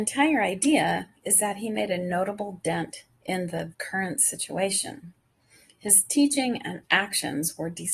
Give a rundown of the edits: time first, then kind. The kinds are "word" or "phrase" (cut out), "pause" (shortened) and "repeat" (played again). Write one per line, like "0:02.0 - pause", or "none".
0:03.7 - word